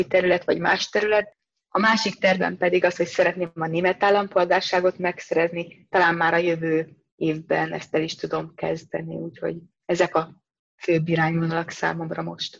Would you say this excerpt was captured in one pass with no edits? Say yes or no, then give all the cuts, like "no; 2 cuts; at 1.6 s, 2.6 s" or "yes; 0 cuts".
yes; 0 cuts